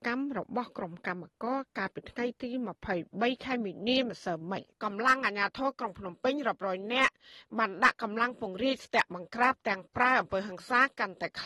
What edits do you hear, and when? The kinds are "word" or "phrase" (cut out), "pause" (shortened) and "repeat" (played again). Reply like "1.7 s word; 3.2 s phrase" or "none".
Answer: 4.7 s pause